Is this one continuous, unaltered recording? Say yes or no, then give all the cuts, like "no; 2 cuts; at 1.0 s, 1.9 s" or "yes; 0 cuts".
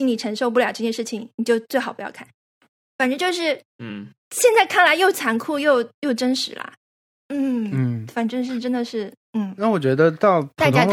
no; 1 cut; at 4.2 s